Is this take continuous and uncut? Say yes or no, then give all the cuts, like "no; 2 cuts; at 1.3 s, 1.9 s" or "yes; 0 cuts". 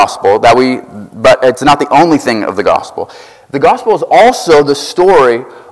yes; 0 cuts